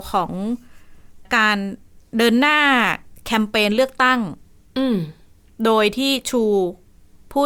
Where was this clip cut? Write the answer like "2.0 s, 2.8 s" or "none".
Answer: none